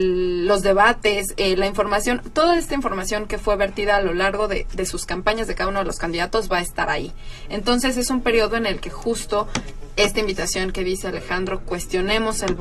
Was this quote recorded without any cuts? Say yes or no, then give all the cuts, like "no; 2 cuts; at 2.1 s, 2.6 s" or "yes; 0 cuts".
yes; 0 cuts